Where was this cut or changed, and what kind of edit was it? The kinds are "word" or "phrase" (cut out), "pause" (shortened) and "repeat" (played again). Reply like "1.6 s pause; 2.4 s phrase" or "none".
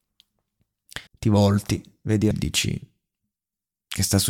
1.1 s pause; 2.3 s word